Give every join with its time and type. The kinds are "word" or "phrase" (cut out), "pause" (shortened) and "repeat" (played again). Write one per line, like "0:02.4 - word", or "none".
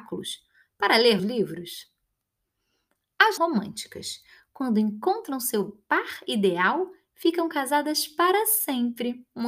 0:01.2 - word
0:03.4 - phrase